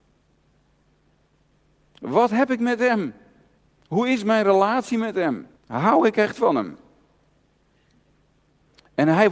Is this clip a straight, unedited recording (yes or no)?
no